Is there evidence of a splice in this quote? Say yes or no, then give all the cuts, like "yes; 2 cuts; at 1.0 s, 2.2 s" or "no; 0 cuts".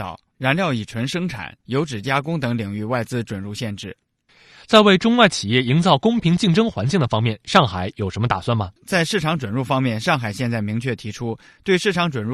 yes; 3 cuts; at 1.6 s, 4.3 s, 8.8 s